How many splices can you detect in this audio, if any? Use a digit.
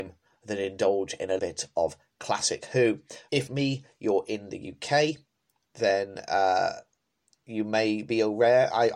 2